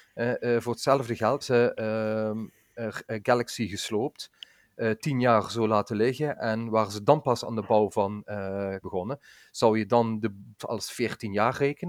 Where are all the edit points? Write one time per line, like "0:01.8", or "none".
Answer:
0:01.4
0:08.8
0:10.6